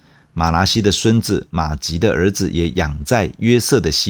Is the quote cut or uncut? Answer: uncut